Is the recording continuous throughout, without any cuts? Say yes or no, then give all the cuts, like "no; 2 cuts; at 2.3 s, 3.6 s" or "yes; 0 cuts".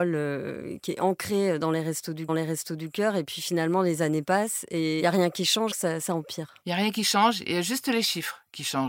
no; 2 cuts; at 2.3 s, 5.7 s